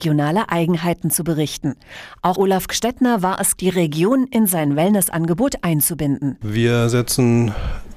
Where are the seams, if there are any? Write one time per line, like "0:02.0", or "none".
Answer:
0:02.4
0:03.6